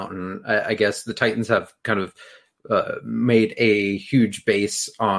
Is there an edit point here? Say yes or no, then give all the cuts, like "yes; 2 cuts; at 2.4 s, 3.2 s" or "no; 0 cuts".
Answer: no; 0 cuts